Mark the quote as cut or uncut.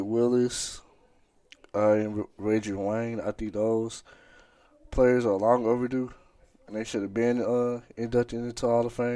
uncut